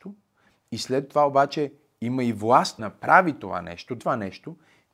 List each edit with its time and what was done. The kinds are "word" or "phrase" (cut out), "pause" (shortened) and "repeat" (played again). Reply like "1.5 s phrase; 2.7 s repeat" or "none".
2.8 s word; 4.0 s word